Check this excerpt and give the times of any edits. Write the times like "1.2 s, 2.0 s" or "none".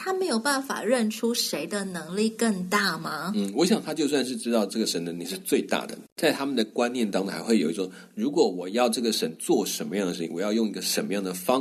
6.1 s